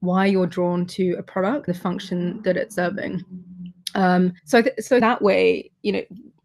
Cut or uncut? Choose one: cut